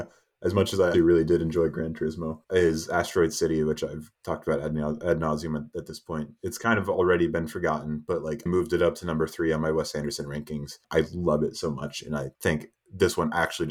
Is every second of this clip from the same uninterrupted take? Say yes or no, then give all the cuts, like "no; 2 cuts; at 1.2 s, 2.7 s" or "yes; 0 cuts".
no; 6 cuts; at 0.9 s, 2.4 s, 4.1 s, 8.5 s, 10.8 s, 12.3 s